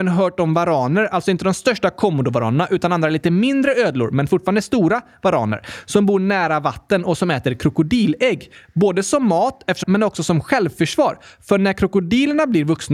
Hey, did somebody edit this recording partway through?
yes; 1 cut; at 9.8 s

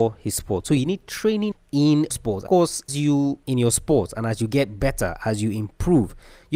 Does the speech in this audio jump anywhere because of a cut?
yes; 5 cuts; at 1.5 s, 2.1 s, 2.5 s, 2.9 s, 3.4 s

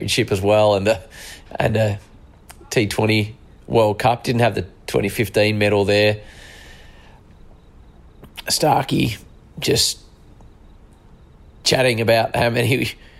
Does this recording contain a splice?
no; 0 cuts

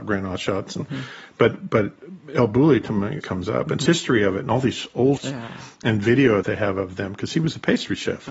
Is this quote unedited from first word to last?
no; 4 cuts; at 3.2 s, 3.9 s, 5.2 s, 6.4 s

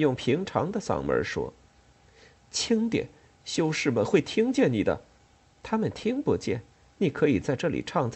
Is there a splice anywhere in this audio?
no; 0 cuts

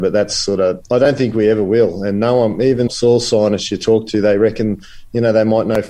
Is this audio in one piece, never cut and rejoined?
no; 1 cut; at 2.9 s

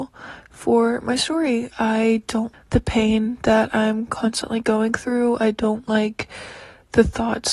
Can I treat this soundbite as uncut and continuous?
no; 2 cuts; at 1.7 s, 2.5 s

